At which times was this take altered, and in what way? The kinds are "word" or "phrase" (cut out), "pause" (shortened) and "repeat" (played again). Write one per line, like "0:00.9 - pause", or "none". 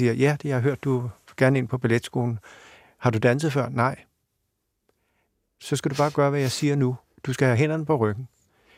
none